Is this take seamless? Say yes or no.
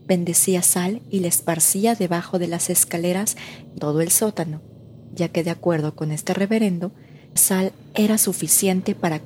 no